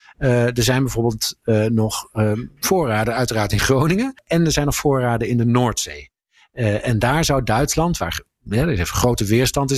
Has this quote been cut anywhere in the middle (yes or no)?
no